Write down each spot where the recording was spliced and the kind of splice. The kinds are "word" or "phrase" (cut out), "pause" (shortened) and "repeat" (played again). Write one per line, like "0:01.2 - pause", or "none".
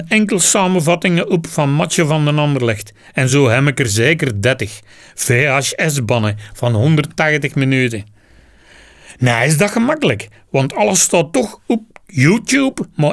none